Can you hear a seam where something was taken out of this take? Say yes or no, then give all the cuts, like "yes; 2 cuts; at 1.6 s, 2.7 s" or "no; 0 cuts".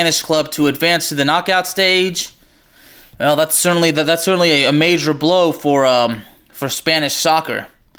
no; 0 cuts